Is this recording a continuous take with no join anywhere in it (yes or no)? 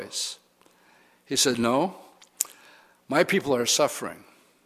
yes